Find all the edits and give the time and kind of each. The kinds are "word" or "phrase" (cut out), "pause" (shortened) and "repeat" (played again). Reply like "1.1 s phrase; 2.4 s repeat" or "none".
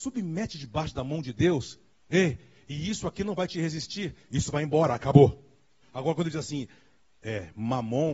none

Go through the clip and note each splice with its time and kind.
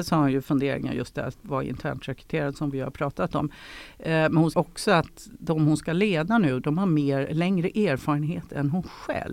4.5 s word

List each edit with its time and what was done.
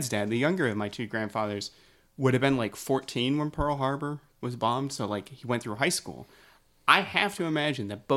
none

